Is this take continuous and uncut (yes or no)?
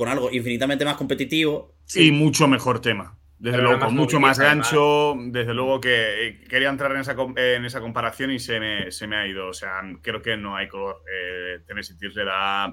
no